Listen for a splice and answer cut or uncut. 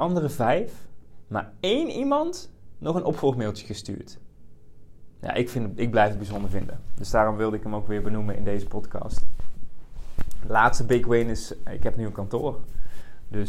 uncut